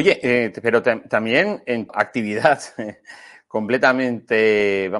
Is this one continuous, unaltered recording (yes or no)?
no